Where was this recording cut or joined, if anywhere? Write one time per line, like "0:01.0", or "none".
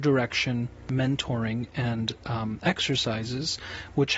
none